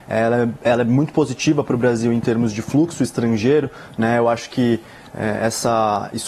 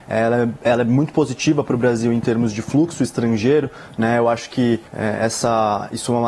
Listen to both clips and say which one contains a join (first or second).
second